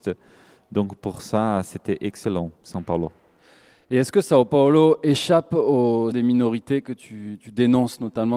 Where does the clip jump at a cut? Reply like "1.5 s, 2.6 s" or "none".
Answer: 6.1 s